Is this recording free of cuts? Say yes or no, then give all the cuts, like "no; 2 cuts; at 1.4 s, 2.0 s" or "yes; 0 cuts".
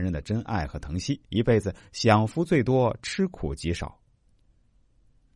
no; 1 cut; at 1.2 s